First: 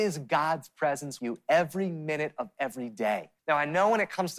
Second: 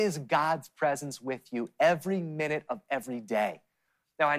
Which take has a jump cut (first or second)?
first